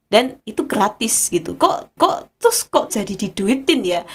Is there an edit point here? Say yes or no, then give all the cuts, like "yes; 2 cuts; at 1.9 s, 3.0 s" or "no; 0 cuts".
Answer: yes; 2 cuts; at 2.0 s, 2.9 s